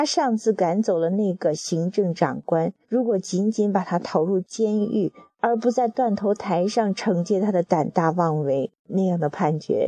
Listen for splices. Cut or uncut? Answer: cut